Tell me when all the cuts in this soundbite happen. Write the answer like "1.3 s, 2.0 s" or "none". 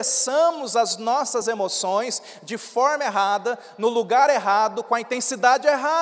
none